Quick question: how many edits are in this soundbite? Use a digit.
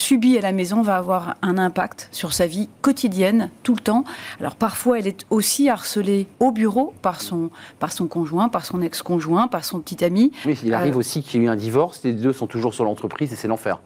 1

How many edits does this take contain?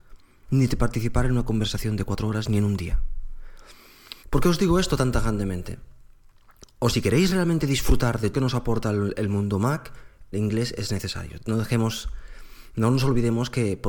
4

